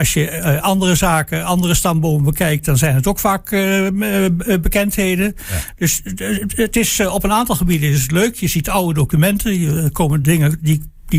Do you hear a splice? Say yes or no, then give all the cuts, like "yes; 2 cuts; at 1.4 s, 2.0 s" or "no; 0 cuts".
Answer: no; 0 cuts